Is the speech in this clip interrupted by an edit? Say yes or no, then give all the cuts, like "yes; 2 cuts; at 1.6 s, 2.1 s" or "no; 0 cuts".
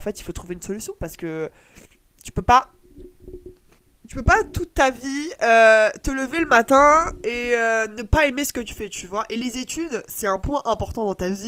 no; 0 cuts